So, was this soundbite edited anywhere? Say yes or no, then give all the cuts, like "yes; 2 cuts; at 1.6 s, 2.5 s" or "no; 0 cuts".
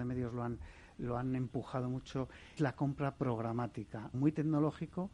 yes; 2 cuts; at 2.6 s, 4.1 s